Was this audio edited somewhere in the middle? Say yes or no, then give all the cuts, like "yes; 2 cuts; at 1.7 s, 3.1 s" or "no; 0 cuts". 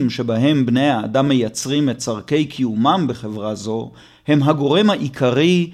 no; 0 cuts